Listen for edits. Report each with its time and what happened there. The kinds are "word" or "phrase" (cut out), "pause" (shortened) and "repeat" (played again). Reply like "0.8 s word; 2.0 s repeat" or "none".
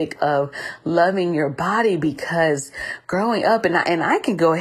none